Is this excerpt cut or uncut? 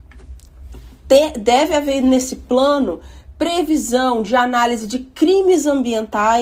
uncut